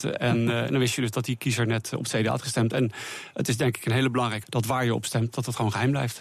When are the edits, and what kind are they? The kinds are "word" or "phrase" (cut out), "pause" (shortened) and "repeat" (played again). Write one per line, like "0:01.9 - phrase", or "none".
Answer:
0:04.4 - word

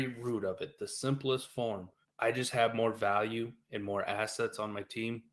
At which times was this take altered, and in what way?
0:02.0 - pause

